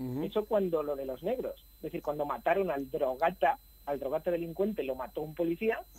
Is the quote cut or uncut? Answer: uncut